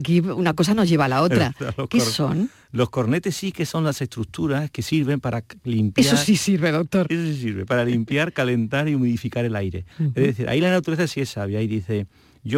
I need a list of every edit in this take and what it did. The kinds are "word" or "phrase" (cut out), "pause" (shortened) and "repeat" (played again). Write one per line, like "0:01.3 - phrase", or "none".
0:09.9 - pause